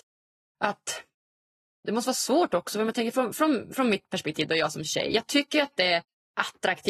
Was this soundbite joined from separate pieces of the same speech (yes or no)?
no